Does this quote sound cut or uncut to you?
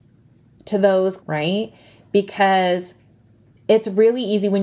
cut